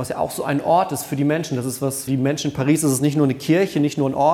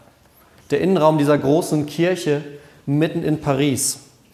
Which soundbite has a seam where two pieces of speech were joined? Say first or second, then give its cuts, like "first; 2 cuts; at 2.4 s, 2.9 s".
first; 1 cut; at 2.1 s